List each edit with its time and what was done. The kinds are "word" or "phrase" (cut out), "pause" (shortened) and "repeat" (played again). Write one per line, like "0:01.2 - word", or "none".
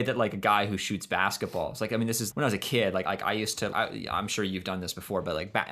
0:02.3 - word
0:03.0 - word
0:03.7 - word